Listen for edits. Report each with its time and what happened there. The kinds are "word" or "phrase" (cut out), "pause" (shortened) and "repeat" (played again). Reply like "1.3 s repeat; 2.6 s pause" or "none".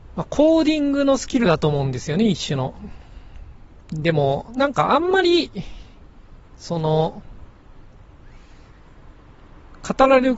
6.4 s pause